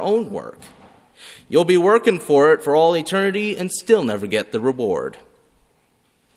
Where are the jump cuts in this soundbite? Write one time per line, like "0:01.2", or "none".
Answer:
none